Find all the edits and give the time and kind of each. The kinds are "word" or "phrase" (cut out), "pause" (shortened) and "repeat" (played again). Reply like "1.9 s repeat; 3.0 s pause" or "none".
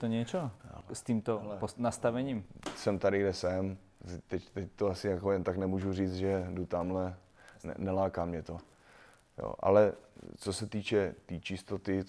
none

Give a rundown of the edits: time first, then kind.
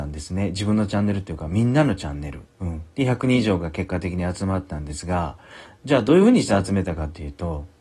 2.5 s pause; 2.9 s pause

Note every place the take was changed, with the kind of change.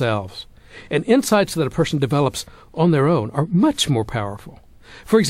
none

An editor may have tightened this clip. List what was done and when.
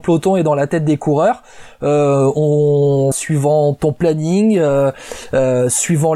3.1 s word

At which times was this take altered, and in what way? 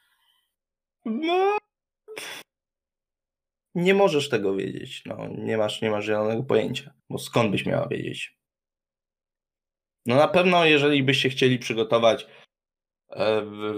7.0 s pause; 9.6 s pause

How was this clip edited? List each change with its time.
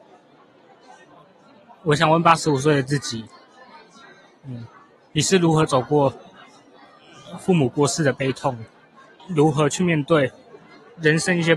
9.2 s word

